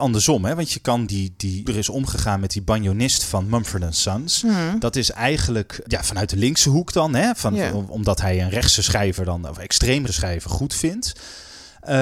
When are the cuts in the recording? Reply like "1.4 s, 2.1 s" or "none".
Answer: 1.1 s, 1.7 s, 5.9 s, 10.1 s